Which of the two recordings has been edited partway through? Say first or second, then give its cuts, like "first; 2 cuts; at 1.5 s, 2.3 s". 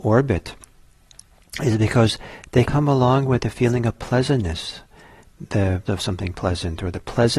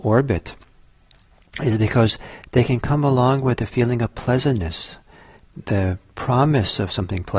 first; 2 cuts; at 2.6 s, 5.9 s